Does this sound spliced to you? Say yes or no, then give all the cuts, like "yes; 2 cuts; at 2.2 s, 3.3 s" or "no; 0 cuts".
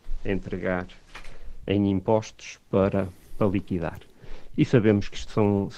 no; 0 cuts